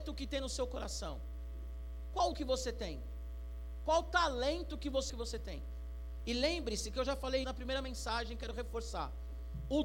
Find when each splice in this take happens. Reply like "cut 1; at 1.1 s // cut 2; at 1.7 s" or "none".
cut 1; at 2.3 s // cut 2; at 5.1 s // cut 3; at 7.4 s